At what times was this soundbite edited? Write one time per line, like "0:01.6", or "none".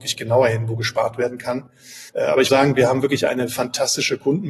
0:02.1
0:02.5